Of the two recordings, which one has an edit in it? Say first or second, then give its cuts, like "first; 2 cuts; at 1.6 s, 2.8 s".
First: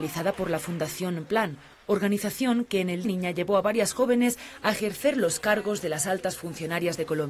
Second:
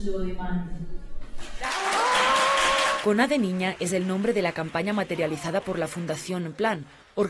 first; 1 cut; at 3.0 s